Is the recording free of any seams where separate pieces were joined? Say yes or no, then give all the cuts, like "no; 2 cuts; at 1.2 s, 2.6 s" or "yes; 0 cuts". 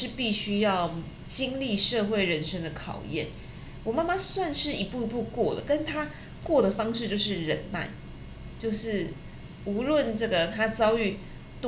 yes; 0 cuts